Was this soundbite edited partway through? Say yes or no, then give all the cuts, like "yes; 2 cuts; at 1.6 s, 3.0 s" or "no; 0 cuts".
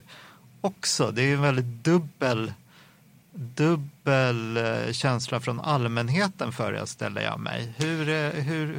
no; 0 cuts